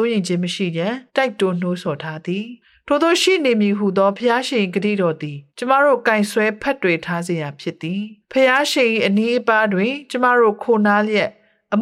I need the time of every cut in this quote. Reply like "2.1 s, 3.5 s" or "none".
1.1 s, 2.6 s, 5.5 s, 8.2 s